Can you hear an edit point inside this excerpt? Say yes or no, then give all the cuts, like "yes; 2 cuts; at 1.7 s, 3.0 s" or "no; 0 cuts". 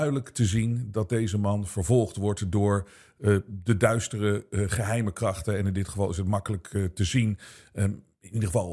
no; 0 cuts